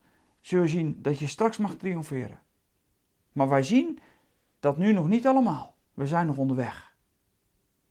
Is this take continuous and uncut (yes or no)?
no